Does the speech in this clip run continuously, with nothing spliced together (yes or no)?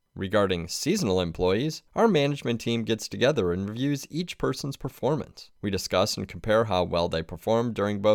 no